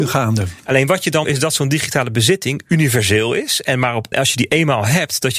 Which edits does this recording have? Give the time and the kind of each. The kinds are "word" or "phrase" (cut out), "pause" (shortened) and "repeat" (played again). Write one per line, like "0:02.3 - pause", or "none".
0:01.2 - phrase
0:04.1 - word